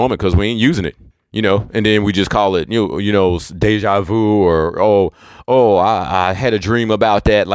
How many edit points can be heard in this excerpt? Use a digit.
1